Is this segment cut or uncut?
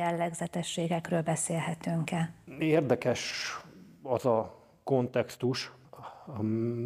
uncut